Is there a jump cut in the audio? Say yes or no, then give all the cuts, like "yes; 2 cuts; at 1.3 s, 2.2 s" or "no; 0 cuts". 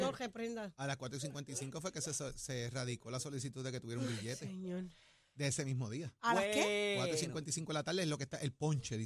no; 0 cuts